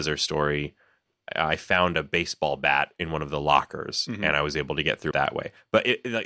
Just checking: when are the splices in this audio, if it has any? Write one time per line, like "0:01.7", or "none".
0:05.1